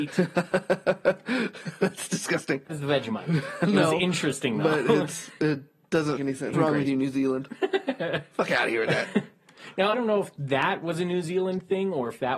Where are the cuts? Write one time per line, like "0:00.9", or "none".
0:02.7
0:06.2
0:06.5
0:09.9